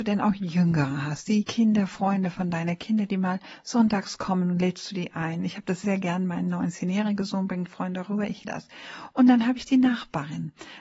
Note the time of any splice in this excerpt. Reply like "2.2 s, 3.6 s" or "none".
5.8 s, 8.4 s